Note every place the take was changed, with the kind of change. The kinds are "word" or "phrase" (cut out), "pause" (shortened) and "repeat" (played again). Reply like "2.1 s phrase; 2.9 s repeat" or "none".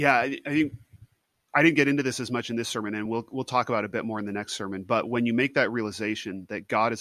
none